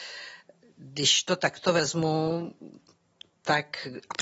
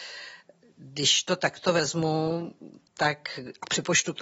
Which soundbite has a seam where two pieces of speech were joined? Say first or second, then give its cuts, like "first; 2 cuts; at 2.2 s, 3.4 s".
second; 1 cut; at 2.9 s